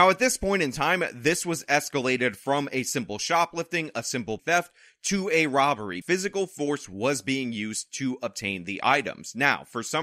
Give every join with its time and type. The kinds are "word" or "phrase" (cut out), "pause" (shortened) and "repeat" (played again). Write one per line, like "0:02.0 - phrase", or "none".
0:04.4 - word
0:06.0 - word